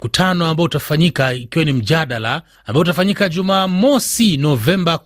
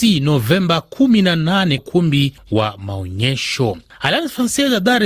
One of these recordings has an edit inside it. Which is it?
second; 1 cut; at 1.8 s

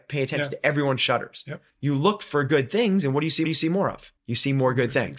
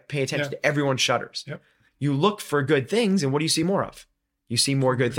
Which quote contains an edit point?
first; 3 cuts; at 1.7 s, 3.4 s, 4.2 s

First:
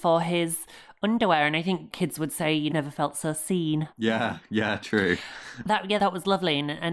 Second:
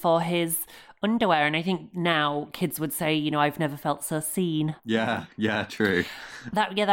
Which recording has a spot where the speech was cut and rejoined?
first; 3 cuts; at 1.9 s, 2.7 s, 6.0 s

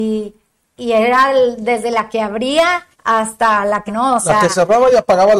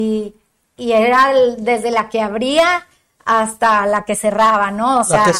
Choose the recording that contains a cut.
first; 2 cuts; at 2.9 s, 3.9 s

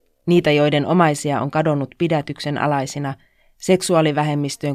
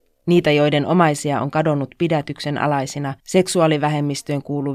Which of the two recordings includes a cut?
second; 1 cut; at 3.2 s

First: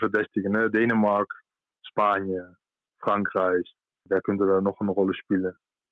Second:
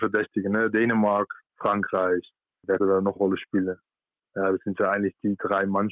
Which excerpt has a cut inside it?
second; 3 cuts; at 1.4 s, 2.8 s, 3.2 s

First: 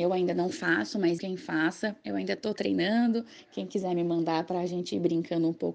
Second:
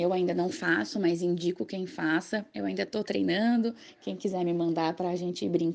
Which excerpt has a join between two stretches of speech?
first; 1 cut; at 1.2 s

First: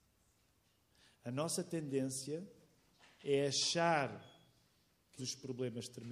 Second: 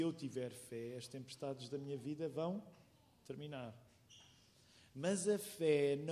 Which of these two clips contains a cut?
first; 1 cut; at 5.2 s

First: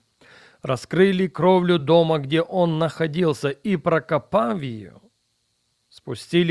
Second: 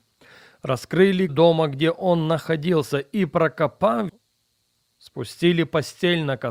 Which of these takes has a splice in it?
second; 2 cuts; at 1.3 s, 4.1 s

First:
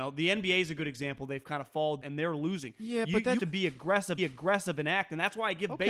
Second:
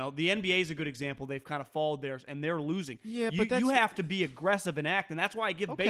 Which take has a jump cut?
first; 3 cuts; at 2.0 s, 3.4 s, 4.2 s

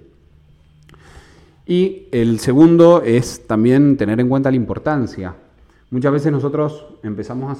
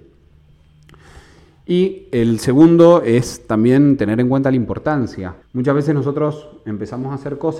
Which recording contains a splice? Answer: second; 1 cut; at 5.4 s

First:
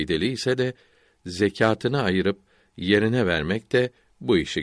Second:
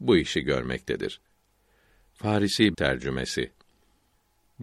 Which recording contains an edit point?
second; 1 cut; at 2.7 s

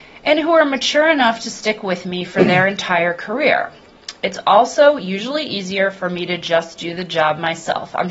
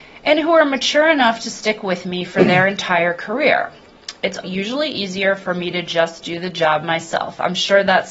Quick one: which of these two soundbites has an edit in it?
second; 1 cut; at 4.4 s

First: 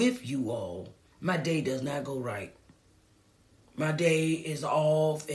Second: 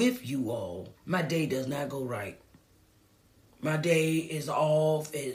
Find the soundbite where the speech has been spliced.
second; 1 cut; at 1.0 s

